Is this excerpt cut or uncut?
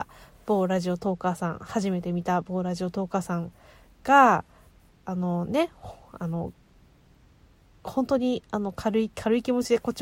uncut